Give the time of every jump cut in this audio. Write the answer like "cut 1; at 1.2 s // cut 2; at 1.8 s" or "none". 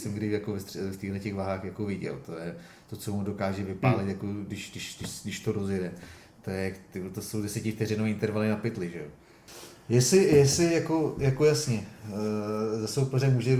none